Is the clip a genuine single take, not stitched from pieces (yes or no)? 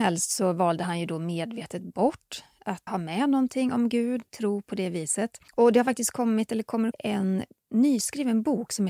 no